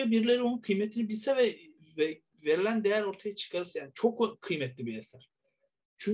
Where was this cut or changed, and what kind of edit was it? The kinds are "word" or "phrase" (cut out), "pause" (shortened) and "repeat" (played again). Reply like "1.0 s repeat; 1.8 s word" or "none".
1.8 s pause